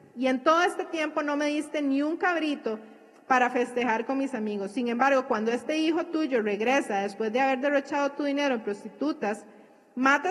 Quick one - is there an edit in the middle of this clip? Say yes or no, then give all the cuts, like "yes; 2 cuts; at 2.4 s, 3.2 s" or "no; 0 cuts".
no; 0 cuts